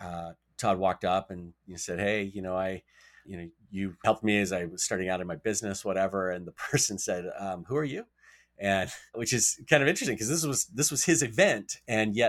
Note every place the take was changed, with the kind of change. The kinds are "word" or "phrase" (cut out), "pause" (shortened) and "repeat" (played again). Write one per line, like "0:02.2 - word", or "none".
0:03.2 - word
0:04.0 - word
0:09.1 - word